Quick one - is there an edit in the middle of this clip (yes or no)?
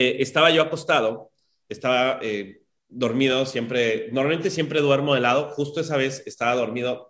no